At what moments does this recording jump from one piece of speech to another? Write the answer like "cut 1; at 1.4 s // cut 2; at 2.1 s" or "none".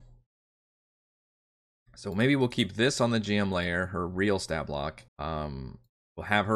cut 1; at 5.1 s